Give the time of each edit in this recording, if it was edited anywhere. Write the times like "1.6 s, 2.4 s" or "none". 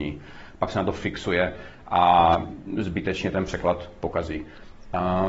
none